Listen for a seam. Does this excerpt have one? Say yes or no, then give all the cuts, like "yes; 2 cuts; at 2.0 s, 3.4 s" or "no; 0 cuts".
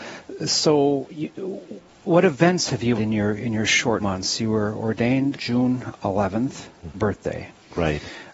yes; 5 cuts; at 1.9 s, 3.0 s, 4.0 s, 5.3 s, 6.9 s